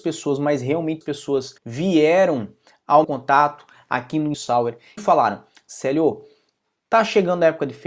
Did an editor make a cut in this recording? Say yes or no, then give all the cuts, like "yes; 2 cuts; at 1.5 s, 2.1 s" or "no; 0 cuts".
yes; 5 cuts; at 1.0 s, 1.6 s, 3.0 s, 4.3 s, 5.0 s